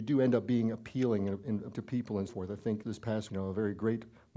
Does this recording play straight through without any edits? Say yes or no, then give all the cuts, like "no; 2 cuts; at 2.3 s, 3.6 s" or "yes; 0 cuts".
no; 4 cuts; at 1.7 s, 2.3 s, 2.8 s, 3.3 s